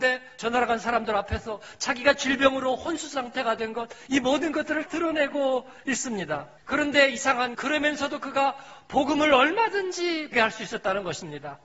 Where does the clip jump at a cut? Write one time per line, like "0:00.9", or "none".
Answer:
0:04.9
0:06.6
0:07.5
0:10.3